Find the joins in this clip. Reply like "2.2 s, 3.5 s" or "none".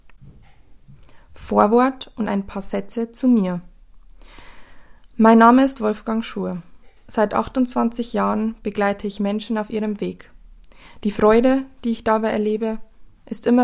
7.0 s